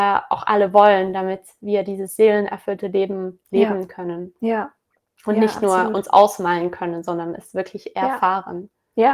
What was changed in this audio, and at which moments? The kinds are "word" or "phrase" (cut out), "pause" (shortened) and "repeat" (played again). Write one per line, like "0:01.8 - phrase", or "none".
none